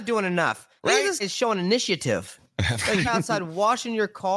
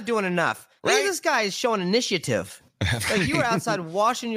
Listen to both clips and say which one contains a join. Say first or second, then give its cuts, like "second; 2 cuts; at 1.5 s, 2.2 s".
first; 2 cuts; at 1.2 s, 3.0 s